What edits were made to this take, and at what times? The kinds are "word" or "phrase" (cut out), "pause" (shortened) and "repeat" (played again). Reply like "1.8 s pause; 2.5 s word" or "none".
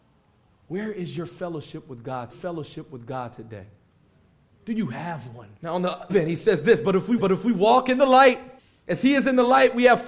2.3 s repeat; 5.6 s pause; 6.1 s word; 7.2 s repeat; 8.6 s pause